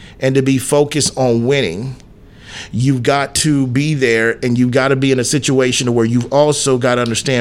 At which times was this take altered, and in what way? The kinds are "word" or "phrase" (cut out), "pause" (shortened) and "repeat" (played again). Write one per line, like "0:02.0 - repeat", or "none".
none